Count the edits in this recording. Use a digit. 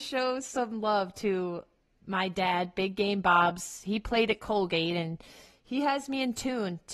0